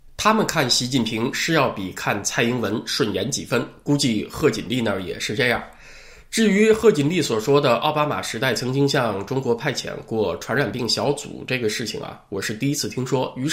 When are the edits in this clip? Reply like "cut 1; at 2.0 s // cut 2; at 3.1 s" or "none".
none

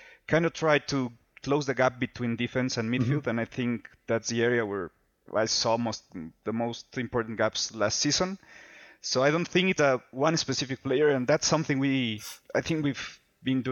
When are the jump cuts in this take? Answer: cut 1; at 9.8 s

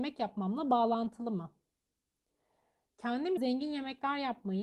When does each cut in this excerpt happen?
cut 1; at 3.4 s

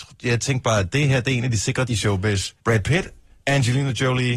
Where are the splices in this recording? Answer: cut 1; at 1.9 s // cut 2; at 2.6 s

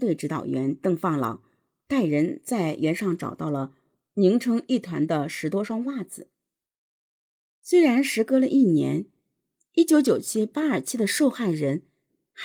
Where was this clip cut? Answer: none

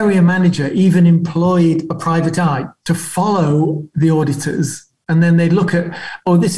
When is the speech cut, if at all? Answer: none

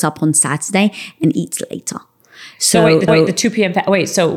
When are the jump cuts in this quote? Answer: cut 1; at 3.1 s

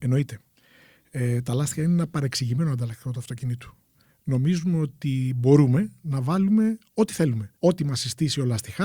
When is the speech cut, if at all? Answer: cut 1; at 7.6 s

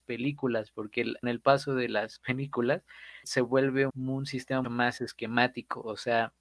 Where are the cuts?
cut 1; at 1.2 s // cut 2; at 3.2 s // cut 3; at 3.9 s // cut 4; at 4.6 s

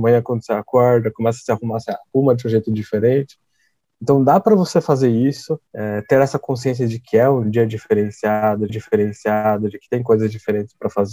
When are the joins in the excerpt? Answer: cut 1; at 5.7 s // cut 2; at 8.7 s

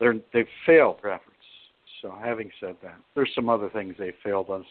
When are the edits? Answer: cut 1; at 1.0 s // cut 2; at 3.0 s

